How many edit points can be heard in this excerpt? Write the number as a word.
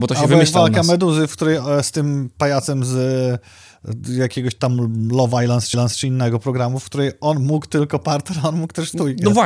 one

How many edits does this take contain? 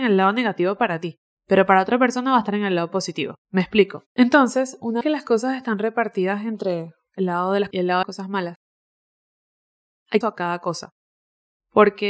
seven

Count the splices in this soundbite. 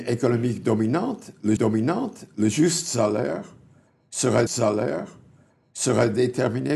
two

